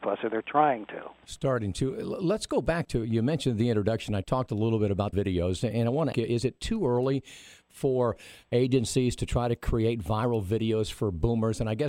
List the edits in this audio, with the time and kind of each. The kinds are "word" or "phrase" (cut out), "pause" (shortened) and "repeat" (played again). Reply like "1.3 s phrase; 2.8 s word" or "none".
5.1 s phrase; 6.1 s phrase